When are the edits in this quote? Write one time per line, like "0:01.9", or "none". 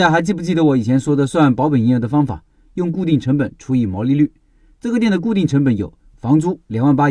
none